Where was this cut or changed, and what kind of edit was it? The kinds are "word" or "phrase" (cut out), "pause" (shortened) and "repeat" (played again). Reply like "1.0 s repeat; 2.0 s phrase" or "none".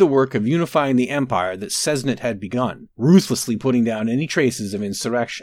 2.9 s pause